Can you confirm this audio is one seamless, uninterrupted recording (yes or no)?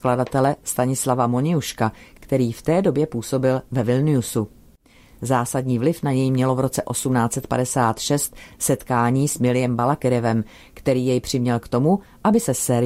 yes